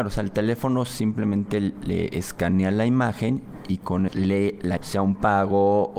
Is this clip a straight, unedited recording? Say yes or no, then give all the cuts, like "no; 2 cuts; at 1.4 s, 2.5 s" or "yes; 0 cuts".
no; 2 cuts; at 4.1 s, 4.8 s